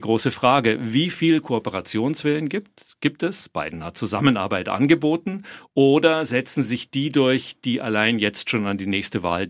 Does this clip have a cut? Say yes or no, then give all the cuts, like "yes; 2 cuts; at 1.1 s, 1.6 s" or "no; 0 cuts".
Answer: no; 0 cuts